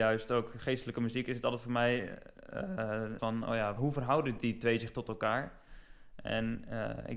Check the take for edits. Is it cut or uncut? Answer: cut